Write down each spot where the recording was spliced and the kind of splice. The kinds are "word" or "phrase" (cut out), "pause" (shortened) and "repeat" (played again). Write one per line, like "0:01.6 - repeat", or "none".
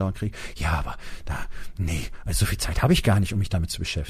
none